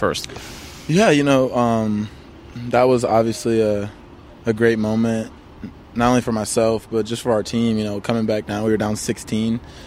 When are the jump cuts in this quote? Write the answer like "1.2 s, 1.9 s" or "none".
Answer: none